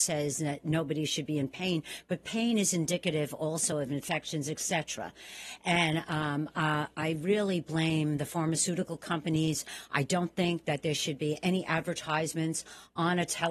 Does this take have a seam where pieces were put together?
no; 0 cuts

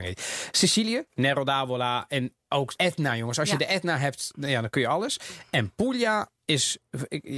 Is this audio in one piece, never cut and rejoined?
no; 3 cuts; at 1.1 s, 2.8 s, 6.4 s

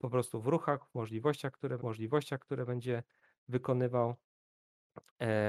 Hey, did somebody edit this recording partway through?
yes; 1 cut; at 1.8 s

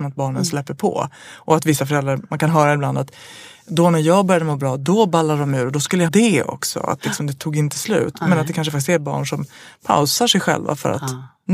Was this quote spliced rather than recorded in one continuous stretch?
yes; 1 cut; at 6.1 s

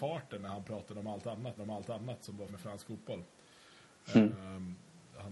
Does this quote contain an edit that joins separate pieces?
yes; 2 cuts; at 1.6 s, 2.5 s

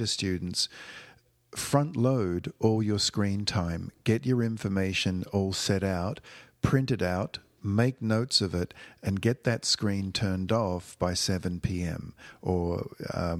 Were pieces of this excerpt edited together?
no; 0 cuts

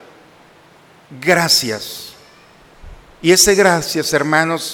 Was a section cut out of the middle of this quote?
no; 0 cuts

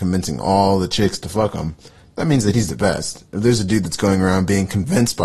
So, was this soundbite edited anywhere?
no; 0 cuts

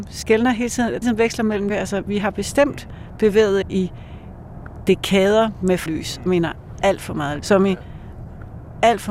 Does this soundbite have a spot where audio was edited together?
yes; 6 cuts; at 1.0 s, 1.7 s, 3.6 s, 5.9 s, 6.3 s, 7.4 s

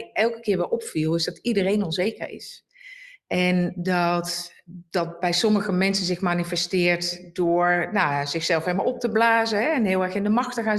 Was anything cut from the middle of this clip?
no; 0 cuts

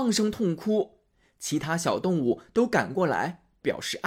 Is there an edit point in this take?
no; 0 cuts

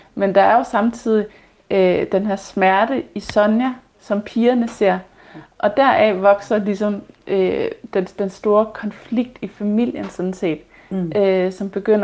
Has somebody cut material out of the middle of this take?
no; 0 cuts

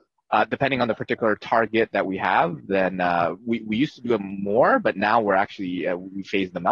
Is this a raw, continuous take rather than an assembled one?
yes; 0 cuts

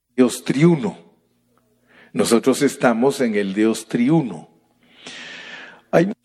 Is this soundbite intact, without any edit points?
yes; 0 cuts

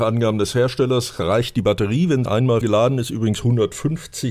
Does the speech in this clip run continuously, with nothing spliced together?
no; 2 cuts; at 2.3 s, 2.6 s

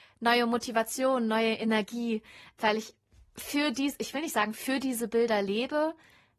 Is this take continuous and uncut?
yes; 0 cuts

